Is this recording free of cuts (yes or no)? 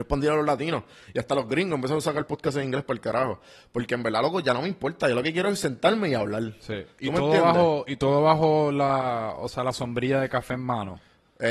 yes